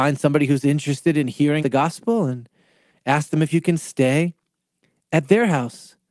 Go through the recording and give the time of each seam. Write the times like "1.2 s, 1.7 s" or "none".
1.6 s